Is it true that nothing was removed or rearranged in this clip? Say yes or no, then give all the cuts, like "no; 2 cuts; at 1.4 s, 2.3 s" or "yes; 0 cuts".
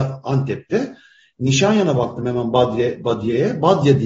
yes; 0 cuts